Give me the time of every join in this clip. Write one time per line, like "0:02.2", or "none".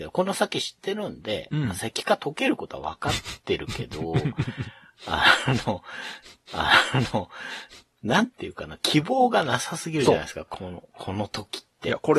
0:06.5